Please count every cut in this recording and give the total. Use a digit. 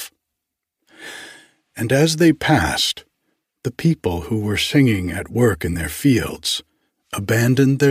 0